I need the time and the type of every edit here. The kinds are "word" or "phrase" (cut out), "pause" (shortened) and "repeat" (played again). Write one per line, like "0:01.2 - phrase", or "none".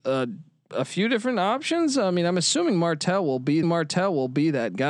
0:03.6 - repeat